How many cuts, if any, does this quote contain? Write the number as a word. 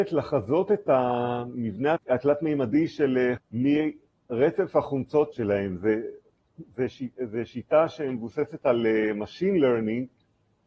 three